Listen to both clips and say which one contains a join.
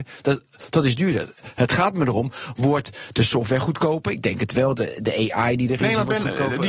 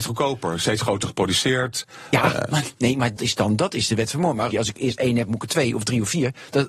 second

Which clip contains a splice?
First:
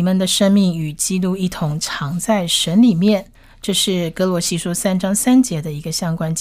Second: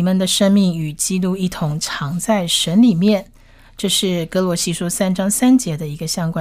first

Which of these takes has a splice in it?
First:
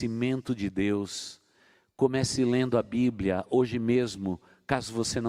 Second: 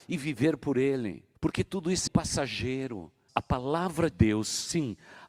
second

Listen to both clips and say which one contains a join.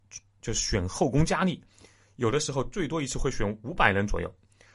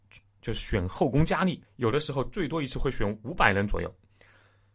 second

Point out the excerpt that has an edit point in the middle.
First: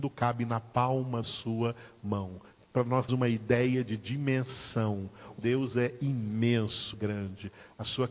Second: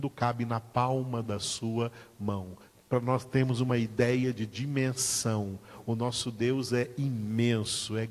first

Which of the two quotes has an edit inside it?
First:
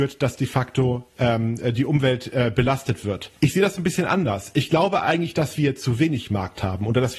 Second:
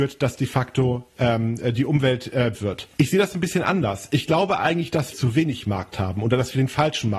second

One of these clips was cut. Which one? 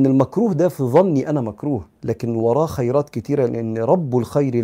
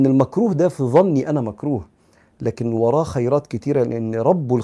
first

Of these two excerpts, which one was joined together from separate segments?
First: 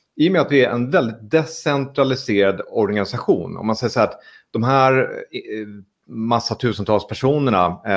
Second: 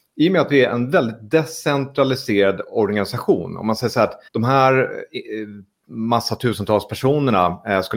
second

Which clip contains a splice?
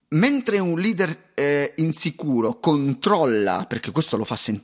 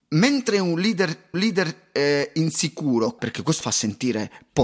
second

